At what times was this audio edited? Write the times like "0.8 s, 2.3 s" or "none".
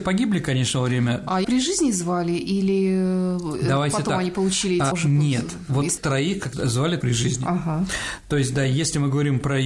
1.4 s, 4.9 s, 6.0 s, 7.0 s